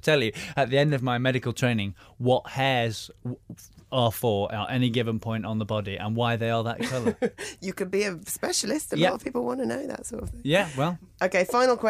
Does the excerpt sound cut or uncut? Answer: uncut